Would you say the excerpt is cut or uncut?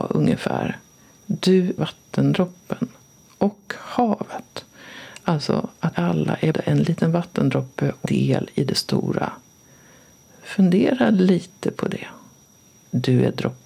cut